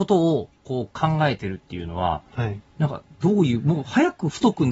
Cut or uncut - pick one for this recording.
uncut